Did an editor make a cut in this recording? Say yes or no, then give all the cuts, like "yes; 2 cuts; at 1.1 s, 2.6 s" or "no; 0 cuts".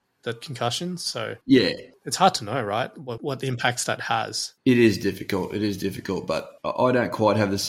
yes; 4 cuts; at 1.4 s, 3.2 s, 4.6 s, 6.6 s